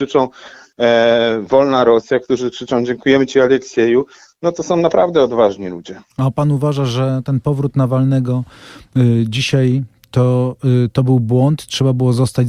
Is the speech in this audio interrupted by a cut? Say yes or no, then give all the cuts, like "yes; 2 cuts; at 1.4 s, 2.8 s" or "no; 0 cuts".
no; 0 cuts